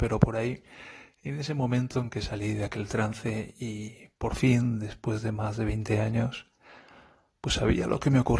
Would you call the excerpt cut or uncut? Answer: uncut